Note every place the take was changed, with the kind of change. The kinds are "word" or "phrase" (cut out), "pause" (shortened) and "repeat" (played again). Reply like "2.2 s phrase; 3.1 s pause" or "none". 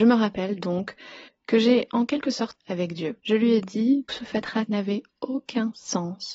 1.3 s pause; 2.6 s word; 3.2 s pause; 4.1 s phrase; 4.7 s word